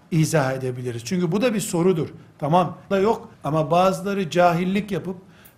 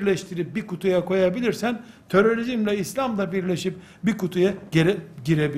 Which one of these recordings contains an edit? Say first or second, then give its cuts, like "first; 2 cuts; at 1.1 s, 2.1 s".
first; 2 cuts; at 2.9 s, 3.3 s